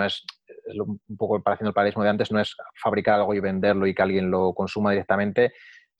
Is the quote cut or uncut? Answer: uncut